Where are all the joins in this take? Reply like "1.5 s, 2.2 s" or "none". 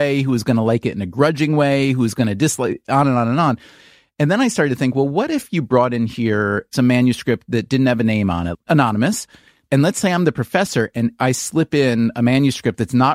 none